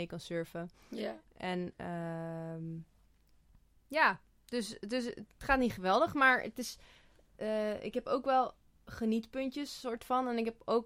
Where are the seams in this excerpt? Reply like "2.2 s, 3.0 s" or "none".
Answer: none